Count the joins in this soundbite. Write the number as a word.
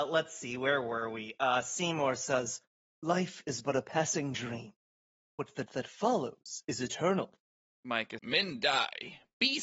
two